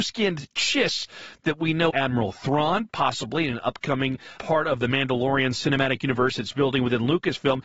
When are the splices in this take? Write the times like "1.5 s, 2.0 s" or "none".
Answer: 1.9 s, 4.4 s